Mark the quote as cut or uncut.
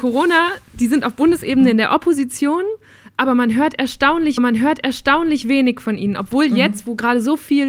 cut